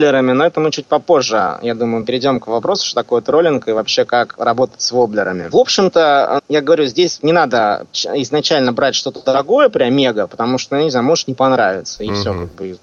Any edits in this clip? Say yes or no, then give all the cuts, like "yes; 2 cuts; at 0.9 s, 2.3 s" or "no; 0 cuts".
yes; 1 cut; at 6.4 s